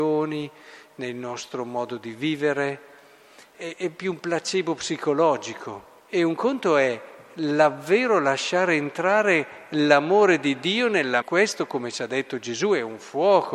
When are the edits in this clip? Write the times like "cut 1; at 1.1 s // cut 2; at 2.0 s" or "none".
cut 1; at 6.0 s // cut 2; at 11.2 s